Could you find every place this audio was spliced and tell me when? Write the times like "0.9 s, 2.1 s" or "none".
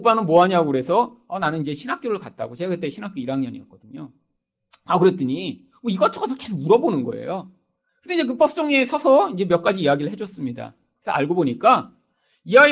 none